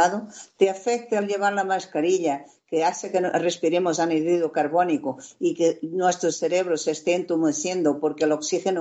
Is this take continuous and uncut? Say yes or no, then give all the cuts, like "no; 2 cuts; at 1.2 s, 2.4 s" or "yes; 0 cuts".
yes; 0 cuts